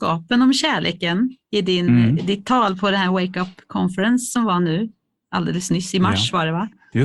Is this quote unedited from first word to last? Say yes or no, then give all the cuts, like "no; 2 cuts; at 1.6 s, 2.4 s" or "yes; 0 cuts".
no; 1 cut; at 1.4 s